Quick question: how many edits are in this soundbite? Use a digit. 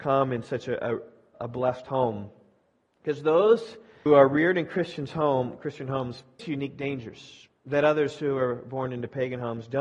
3